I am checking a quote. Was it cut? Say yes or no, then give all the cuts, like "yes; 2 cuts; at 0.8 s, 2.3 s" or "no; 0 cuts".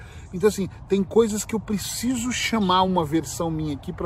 no; 0 cuts